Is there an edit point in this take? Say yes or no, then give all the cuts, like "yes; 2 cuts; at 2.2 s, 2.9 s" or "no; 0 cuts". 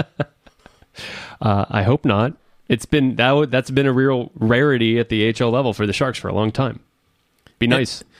no; 0 cuts